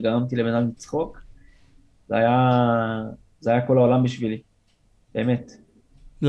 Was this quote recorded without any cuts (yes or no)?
yes